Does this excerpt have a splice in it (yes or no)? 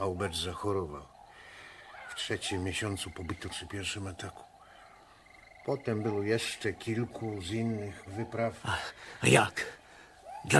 yes